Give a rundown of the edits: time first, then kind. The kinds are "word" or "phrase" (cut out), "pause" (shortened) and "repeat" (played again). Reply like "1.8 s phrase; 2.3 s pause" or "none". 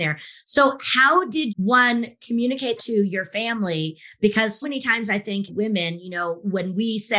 1.5 s word; 2.8 s word; 4.6 s word; 5.5 s word